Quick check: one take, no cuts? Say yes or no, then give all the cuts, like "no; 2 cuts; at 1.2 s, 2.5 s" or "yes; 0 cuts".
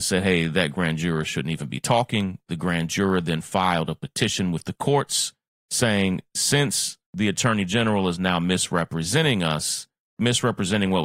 yes; 0 cuts